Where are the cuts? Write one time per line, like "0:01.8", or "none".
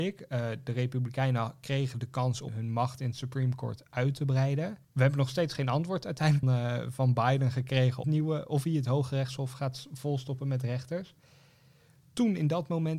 0:02.5
0:04.8
0:06.4
0:08.0